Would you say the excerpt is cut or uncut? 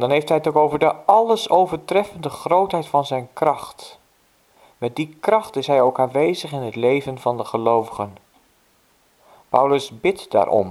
uncut